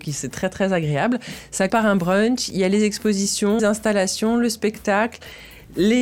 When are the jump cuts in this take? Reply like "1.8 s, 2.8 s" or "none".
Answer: 1.7 s, 3.6 s